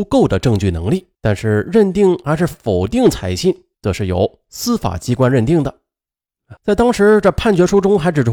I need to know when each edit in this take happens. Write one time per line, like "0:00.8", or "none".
0:01.1
0:03.7
0:06.6